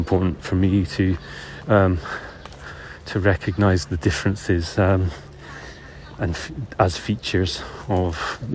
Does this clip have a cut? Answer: yes; 1 cut; at 6.2 s

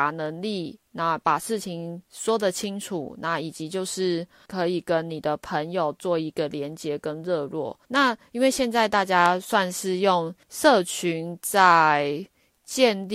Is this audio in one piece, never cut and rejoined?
no; 4 cuts; at 2.0 s, 4.5 s, 7.8 s, 10.4 s

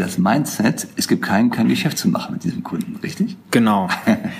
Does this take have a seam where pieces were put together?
yes; 1 cut; at 1.5 s

